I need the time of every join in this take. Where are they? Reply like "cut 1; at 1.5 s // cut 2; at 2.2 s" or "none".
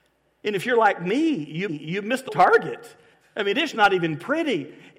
cut 1; at 1.7 s // cut 2; at 2.3 s // cut 3; at 3.1 s // cut 4; at 3.7 s